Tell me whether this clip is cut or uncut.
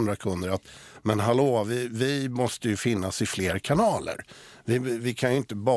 uncut